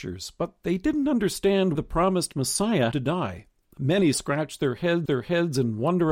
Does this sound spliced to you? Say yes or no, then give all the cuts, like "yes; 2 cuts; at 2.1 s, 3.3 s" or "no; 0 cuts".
yes; 4 cuts; at 1.8 s, 2.9 s, 4.1 s, 5.1 s